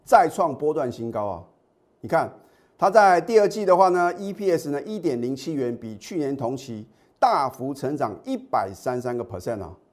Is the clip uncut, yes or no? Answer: yes